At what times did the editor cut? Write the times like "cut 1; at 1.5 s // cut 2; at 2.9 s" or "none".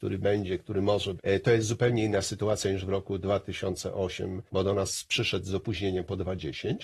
cut 1; at 1.2 s // cut 2; at 4.5 s